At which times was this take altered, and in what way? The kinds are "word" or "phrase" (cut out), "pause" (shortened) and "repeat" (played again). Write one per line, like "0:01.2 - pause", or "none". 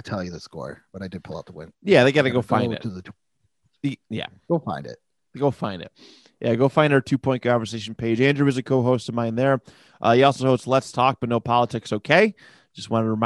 none